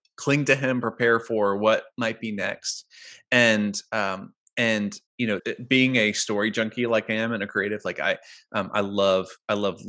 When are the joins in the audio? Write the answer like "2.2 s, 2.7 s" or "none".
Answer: 5.1 s, 5.4 s